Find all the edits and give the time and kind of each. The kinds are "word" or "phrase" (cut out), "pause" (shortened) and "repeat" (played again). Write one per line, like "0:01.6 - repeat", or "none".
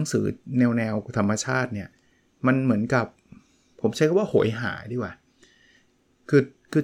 none